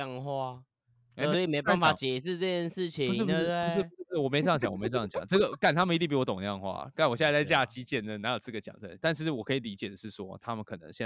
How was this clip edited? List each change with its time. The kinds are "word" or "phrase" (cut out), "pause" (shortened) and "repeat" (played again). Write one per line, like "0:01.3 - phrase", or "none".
0:01.3 - phrase